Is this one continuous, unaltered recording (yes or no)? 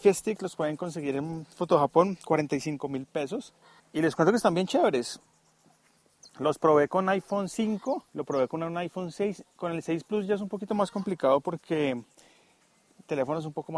no